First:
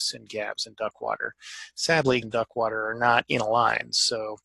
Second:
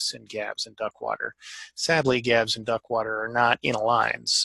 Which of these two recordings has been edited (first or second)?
first